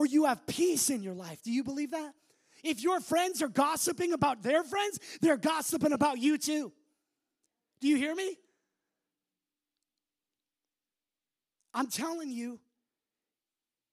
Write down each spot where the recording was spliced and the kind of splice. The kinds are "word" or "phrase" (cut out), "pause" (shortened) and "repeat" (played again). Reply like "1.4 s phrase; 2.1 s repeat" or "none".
none